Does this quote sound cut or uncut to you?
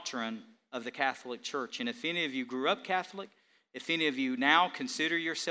uncut